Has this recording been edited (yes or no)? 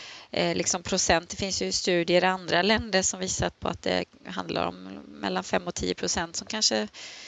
no